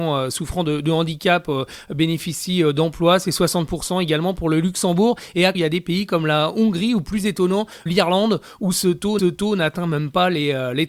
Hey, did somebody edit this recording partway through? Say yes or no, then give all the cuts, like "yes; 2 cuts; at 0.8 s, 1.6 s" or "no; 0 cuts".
yes; 3 cuts; at 5.5 s, 7.9 s, 9.2 s